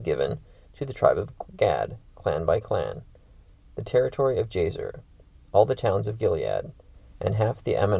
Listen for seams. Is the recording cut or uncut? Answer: uncut